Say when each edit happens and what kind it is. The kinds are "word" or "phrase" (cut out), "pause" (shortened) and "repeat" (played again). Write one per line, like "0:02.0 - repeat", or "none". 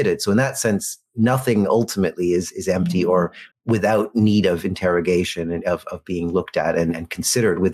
0:03.5 - pause